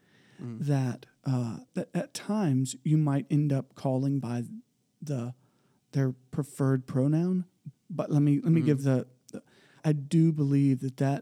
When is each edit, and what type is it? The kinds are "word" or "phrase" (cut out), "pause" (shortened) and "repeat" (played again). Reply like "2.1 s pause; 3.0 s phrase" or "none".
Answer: 1.7 s word; 4.2 s word; 7.7 s word; 9.8 s word